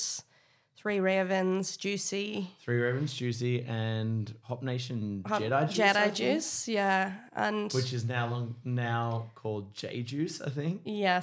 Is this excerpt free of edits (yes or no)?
no